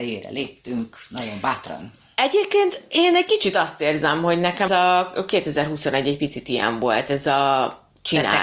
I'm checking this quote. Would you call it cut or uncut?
cut